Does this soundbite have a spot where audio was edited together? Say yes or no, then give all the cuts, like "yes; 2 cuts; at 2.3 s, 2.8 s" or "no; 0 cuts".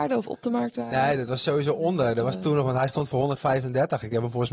no; 0 cuts